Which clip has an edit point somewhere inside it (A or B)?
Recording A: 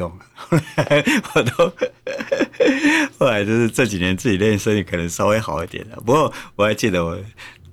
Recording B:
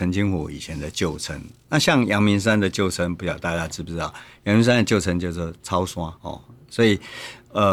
B